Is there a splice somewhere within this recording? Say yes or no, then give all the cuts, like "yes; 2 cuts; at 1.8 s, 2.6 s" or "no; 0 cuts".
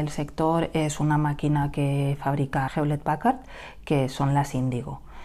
yes; 1 cut; at 2.7 s